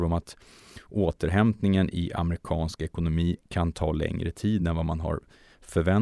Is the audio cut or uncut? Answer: uncut